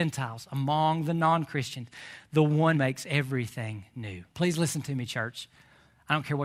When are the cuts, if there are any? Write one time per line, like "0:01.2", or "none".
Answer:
0:02.7
0:04.3